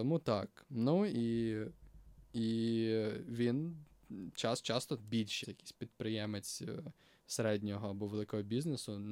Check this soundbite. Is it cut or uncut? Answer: cut